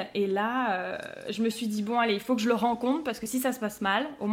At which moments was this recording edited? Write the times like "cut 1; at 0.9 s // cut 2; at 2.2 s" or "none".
none